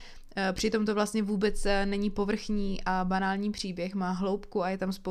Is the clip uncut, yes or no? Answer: yes